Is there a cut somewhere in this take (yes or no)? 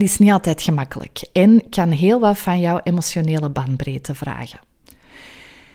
no